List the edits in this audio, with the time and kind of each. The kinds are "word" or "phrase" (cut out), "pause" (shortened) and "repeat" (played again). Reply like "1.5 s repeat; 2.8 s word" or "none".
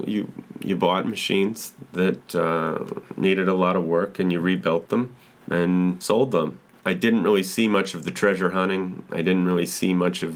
5.2 s pause